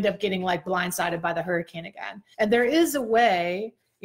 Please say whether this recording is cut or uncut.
cut